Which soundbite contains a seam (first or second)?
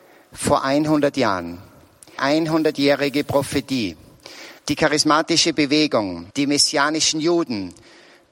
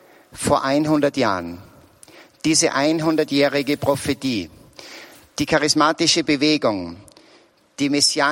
first